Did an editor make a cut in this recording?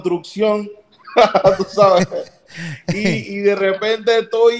no; 0 cuts

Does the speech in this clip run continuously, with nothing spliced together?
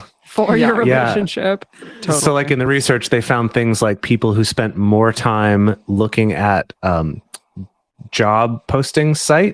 yes; 0 cuts

